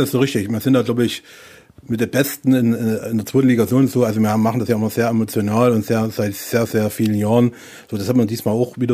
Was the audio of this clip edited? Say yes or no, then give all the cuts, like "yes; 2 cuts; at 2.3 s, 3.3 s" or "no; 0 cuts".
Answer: no; 0 cuts